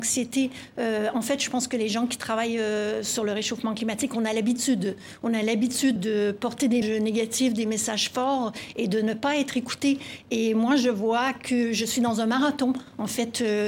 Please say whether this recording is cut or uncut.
cut